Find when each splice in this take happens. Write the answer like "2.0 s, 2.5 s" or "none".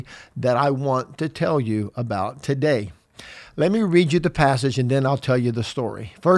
none